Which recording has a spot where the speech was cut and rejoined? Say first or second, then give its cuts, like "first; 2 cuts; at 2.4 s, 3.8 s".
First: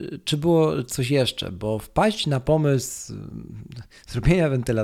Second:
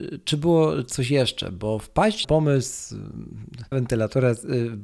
second; 2 cuts; at 2.2 s, 3.7 s